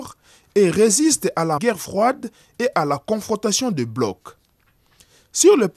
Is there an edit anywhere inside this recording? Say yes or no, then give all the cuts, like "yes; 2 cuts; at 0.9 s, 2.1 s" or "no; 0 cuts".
yes; 1 cut; at 1.6 s